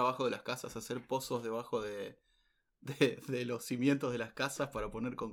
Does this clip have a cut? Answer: no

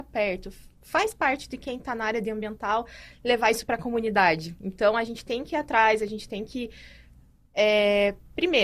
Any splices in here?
no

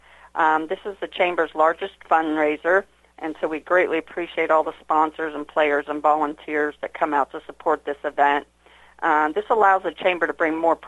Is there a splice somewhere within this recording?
no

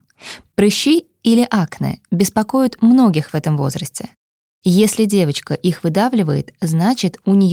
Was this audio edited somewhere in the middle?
no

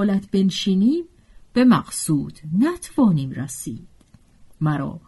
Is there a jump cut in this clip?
no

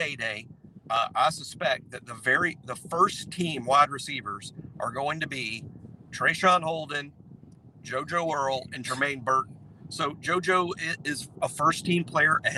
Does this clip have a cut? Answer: no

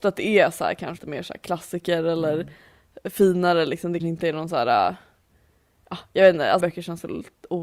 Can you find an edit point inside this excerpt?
yes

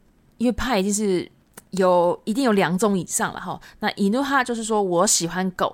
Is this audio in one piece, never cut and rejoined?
no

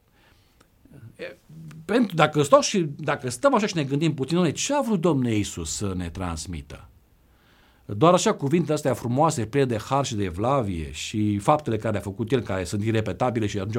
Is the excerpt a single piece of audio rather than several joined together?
yes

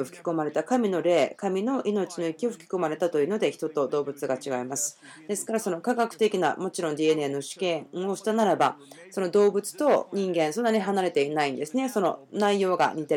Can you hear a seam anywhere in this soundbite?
no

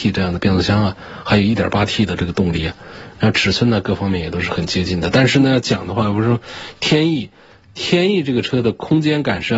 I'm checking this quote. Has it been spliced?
no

